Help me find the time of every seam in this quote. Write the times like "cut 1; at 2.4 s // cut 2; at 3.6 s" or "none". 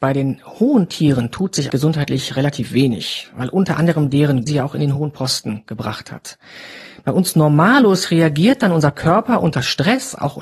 cut 1; at 1.7 s // cut 2; at 4.5 s